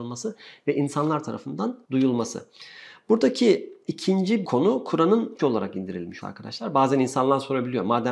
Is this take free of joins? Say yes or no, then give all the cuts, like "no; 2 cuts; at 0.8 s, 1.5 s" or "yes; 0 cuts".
no; 4 cuts; at 1.8 s, 4.4 s, 5.4 s, 6.2 s